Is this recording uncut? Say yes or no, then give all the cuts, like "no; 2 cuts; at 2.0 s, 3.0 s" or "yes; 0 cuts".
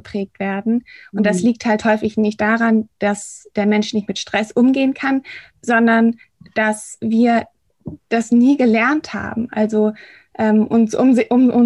yes; 0 cuts